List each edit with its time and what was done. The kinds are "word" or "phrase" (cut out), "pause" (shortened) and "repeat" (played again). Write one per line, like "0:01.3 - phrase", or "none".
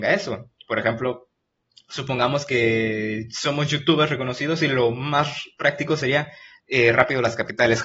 none